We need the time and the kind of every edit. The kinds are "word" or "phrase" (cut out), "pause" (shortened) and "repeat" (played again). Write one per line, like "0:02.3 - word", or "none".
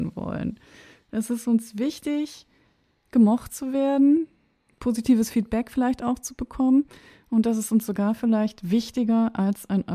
none